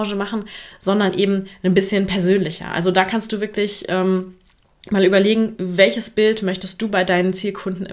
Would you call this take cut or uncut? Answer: uncut